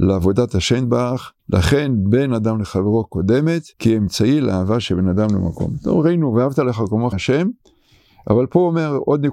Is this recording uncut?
no; 3 cuts; at 1.4 s, 3.7 s, 7.1 s

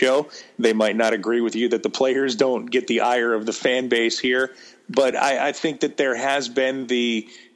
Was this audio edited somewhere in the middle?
no; 0 cuts

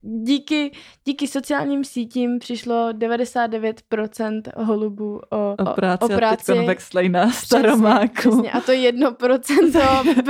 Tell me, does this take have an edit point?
yes; 1 cut; at 5.5 s

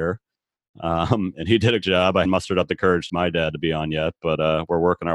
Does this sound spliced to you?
yes; 3 cuts; at 1.8 s, 2.2 s, 3.1 s

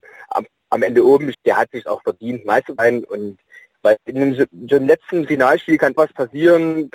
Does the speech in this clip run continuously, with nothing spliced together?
no; 4 cuts; at 1.3 s, 2.8 s, 4.0 s, 6.0 s

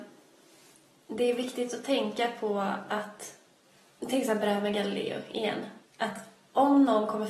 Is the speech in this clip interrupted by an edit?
yes; 2 cuts; at 3.6 s, 5.9 s

